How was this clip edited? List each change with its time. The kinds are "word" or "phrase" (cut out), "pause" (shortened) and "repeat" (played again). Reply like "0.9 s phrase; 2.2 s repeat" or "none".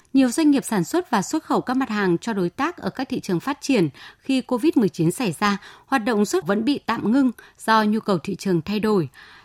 6.4 s word